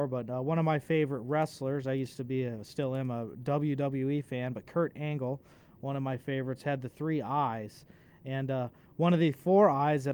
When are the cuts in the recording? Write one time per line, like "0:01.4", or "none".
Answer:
none

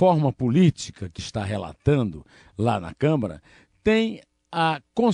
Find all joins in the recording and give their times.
0:01.2

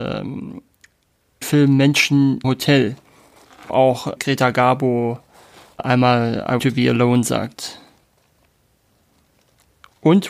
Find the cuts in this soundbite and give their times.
0:01.4
0:02.4
0:03.7
0:04.2
0:05.8
0:06.6

